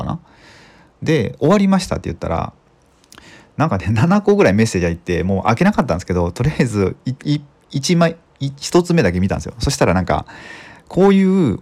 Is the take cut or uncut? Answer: uncut